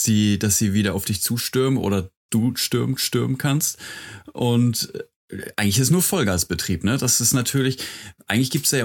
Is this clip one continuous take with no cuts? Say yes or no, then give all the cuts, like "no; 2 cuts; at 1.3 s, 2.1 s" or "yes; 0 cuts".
no; 2 cuts; at 2.3 s, 3.0 s